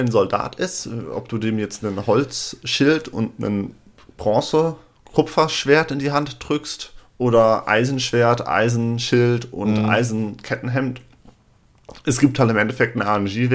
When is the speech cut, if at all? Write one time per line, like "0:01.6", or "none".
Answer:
none